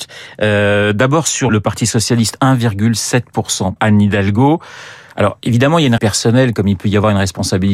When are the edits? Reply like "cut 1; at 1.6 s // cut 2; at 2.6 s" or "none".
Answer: cut 1; at 1.5 s // cut 2; at 3.8 s // cut 3; at 6.0 s

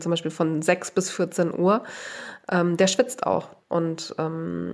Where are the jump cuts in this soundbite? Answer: cut 1; at 3.6 s

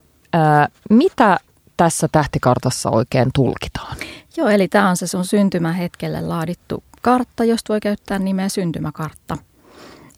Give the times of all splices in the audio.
none

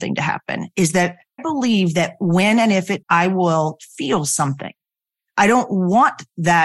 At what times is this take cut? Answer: cut 1; at 1.4 s // cut 2; at 3.0 s

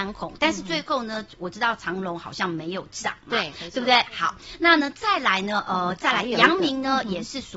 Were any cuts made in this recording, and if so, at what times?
none

